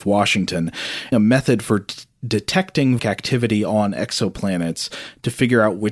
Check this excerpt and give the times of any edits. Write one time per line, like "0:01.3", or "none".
0:01.1
0:03.0